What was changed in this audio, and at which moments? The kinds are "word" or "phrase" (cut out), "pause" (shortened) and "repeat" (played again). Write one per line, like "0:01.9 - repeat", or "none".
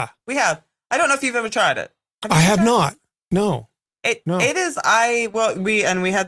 none